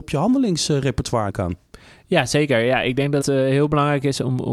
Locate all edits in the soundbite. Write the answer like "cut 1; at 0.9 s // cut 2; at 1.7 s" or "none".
cut 1; at 1.3 s // cut 2; at 3.2 s